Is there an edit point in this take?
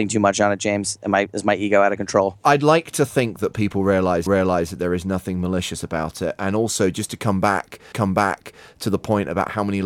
yes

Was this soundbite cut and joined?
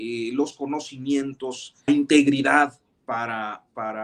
yes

